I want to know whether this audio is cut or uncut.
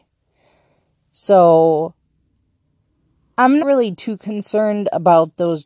cut